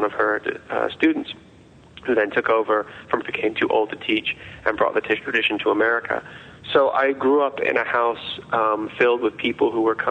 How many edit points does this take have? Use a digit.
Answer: 1